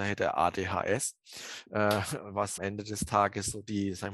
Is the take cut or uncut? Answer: cut